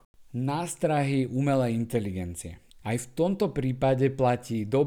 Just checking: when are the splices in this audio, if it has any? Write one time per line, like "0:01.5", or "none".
0:02.7

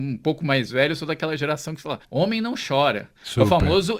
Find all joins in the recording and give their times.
0:02.0

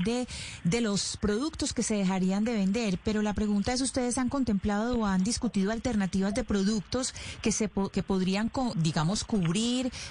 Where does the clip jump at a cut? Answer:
0:08.7

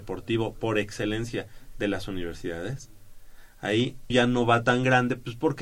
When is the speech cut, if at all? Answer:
0:04.1

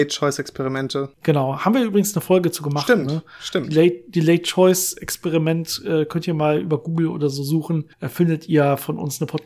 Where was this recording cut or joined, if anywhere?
0:07.9

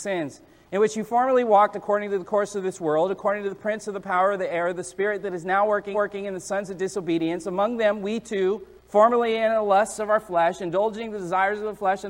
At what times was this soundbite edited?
0:05.9
0:08.8

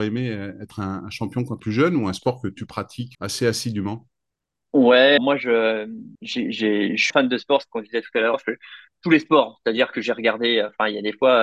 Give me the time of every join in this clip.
0:01.6
0:03.1
0:05.2
0:06.1
0:07.1
0:08.3

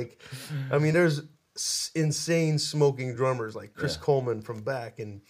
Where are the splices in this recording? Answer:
none

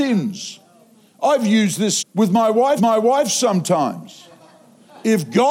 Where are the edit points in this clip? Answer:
0:02.0
0:02.8

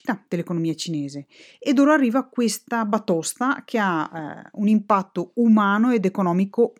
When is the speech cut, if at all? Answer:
none

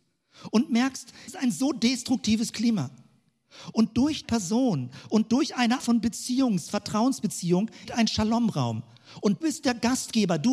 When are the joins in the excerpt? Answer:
0:01.3
0:04.2
0:05.8
0:07.9
0:09.4

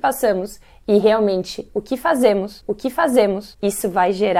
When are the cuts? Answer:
0:02.6

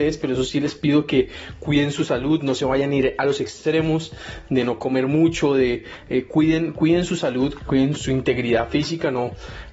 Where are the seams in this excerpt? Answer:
0:07.6
0:08.0

